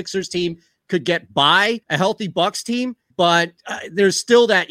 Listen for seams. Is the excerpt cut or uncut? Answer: cut